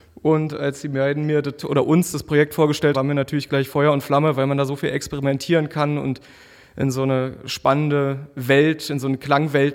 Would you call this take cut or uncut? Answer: cut